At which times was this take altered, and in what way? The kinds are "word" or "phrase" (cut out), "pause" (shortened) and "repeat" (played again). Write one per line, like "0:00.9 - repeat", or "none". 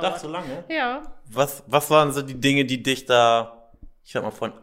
none

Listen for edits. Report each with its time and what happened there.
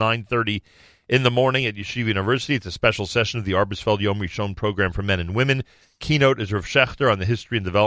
none

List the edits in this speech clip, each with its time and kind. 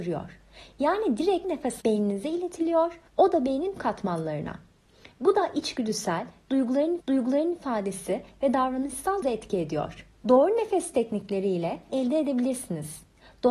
0:01.4 - word
0:01.8 - word
0:03.1 - pause
0:03.8 - word
0:07.0 - repeat
0:09.2 - word
0:10.1 - pause
0:11.9 - phrase

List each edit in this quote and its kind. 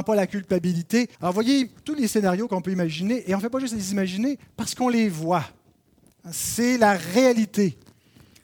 0:01.1 - pause

